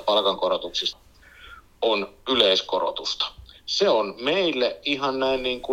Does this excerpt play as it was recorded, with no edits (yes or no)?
no